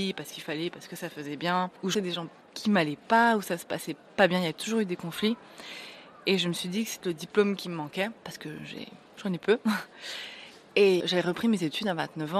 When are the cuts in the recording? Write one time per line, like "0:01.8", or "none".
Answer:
0:01.9
0:07.0
0:08.2
0:09.1
0:11.0